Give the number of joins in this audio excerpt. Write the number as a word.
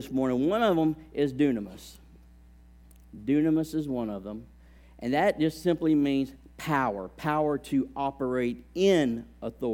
zero